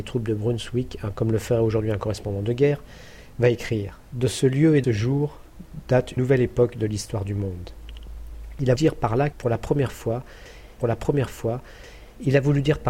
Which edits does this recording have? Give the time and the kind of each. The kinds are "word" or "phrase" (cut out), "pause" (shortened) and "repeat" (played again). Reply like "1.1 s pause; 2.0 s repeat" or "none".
1.1 s word; 4.8 s word; 6.2 s word; 8.8 s word; 9.3 s word; 10.8 s repeat